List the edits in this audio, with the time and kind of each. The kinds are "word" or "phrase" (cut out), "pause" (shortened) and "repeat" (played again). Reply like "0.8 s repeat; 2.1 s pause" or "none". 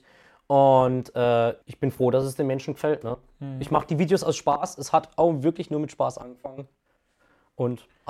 1.6 s pause